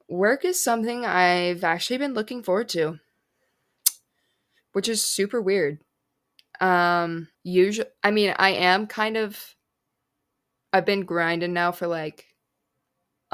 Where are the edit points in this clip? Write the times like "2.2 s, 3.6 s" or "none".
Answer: 7.3 s